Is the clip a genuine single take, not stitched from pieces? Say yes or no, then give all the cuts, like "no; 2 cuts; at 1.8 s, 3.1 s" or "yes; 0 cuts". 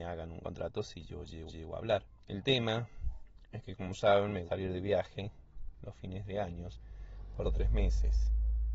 no; 4 cuts; at 1.5 s, 2.2 s, 4.5 s, 7.4 s